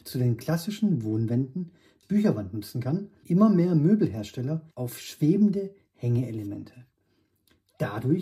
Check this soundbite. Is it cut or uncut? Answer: cut